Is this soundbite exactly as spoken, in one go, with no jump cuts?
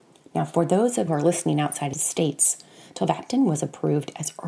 no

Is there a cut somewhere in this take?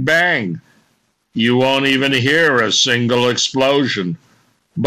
no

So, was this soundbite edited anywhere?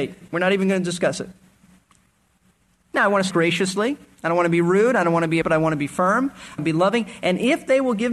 yes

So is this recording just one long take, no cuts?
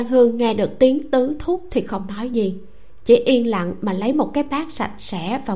yes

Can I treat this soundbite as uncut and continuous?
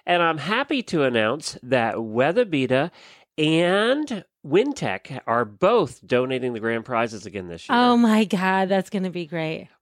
yes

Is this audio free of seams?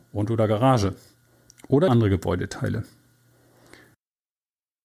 no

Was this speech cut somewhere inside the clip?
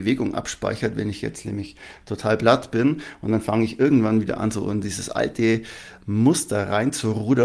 no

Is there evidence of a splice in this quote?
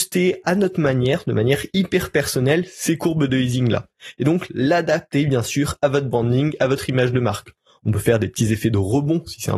no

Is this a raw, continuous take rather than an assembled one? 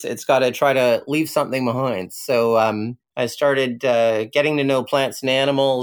yes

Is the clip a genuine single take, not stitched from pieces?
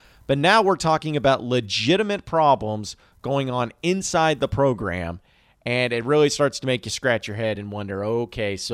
yes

